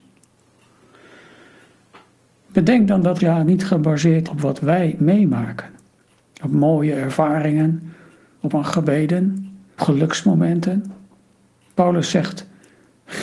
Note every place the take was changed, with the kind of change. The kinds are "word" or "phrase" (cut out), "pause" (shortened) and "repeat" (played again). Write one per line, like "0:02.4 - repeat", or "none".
0:03.2 - word
0:04.3 - word
0:08.5 - word
0:09.8 - word